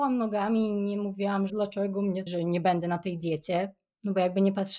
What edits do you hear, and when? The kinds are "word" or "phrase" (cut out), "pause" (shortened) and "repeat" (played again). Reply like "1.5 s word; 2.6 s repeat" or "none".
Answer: 1.5 s word; 2.3 s phrase